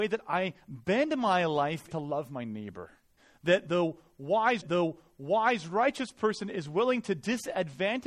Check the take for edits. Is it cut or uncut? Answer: cut